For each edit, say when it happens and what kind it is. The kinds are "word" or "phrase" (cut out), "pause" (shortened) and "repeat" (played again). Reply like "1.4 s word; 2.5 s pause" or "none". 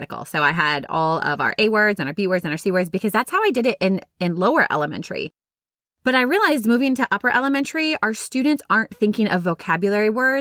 none